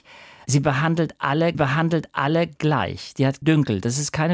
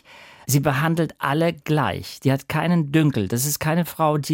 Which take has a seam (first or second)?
first